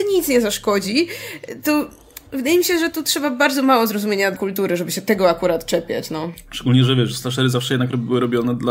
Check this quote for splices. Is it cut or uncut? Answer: cut